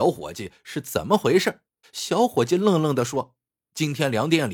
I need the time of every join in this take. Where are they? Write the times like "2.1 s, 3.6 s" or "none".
1.8 s